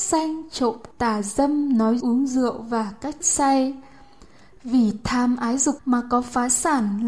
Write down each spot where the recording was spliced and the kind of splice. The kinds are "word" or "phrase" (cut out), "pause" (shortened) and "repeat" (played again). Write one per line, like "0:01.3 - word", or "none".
0:00.9 - word
0:02.0 - word
0:03.2 - word
0:05.8 - word